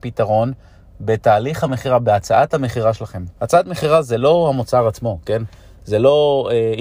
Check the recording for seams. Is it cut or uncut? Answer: cut